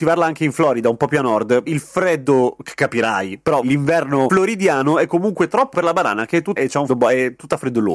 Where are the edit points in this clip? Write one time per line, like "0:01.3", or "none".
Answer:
0:01.7
0:03.6
0:05.7
0:06.6
0:06.9